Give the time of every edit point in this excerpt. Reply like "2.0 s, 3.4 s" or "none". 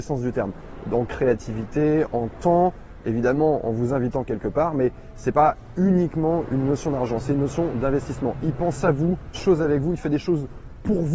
9.3 s

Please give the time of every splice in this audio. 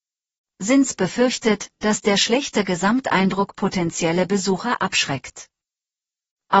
none

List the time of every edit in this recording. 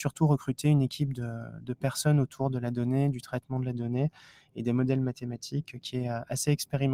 none

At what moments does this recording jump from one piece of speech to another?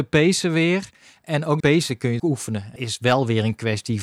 1.6 s, 2.2 s, 2.8 s

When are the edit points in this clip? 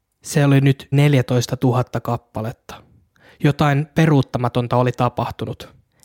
0.9 s

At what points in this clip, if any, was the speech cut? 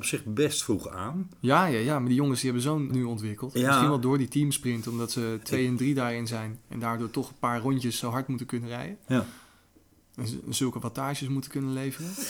2.9 s

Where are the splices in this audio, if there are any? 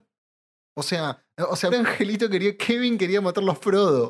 1.7 s

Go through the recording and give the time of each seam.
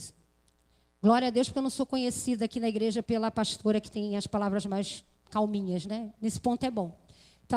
none

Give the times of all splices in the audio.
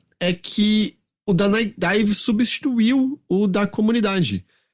none

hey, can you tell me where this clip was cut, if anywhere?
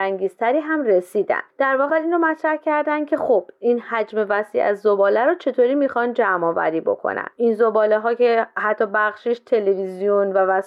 1.5 s, 1.9 s, 7.3 s

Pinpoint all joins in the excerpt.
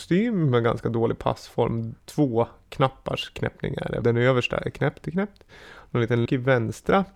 2.0 s, 4.0 s, 5.0 s, 6.3 s

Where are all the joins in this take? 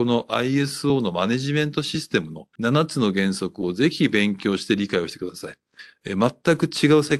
2.5 s

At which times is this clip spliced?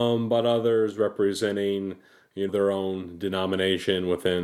2.5 s

